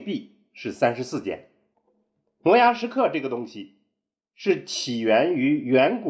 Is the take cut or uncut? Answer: cut